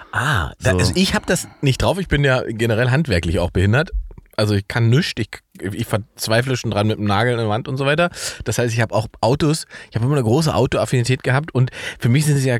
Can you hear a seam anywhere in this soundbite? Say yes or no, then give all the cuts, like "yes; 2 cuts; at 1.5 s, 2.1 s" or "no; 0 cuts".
yes; 1 cut; at 1.5 s